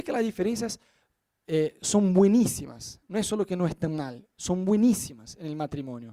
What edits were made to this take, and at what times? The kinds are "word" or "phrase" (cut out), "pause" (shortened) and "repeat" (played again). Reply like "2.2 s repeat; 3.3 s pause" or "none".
none